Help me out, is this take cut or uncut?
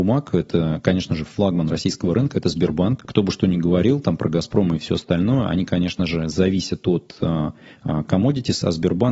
uncut